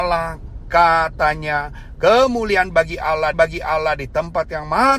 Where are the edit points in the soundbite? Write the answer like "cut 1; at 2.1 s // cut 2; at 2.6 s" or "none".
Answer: cut 1; at 3.3 s